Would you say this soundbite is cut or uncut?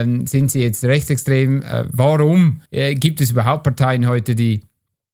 cut